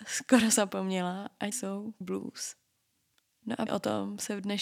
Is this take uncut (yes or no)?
no